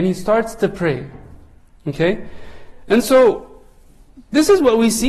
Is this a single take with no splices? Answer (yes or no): yes